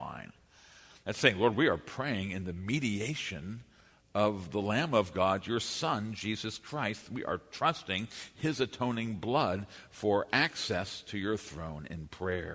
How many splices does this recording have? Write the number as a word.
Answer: zero